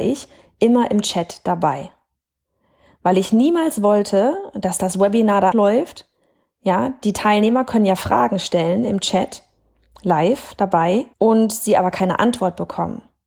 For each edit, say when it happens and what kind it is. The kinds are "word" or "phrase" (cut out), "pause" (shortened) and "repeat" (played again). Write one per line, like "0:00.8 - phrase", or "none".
0:05.5 - word
0:11.1 - pause